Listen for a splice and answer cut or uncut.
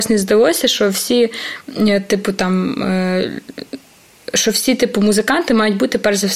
uncut